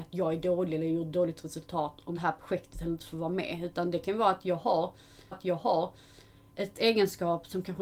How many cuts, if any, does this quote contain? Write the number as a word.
two